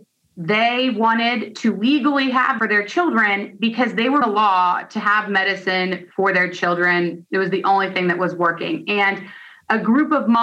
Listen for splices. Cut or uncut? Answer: cut